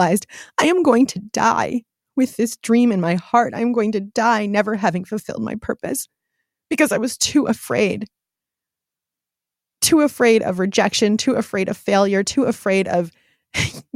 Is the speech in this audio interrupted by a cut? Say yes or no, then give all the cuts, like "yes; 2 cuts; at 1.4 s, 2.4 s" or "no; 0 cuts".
no; 0 cuts